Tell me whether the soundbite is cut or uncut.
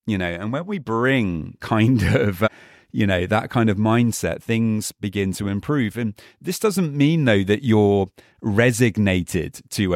cut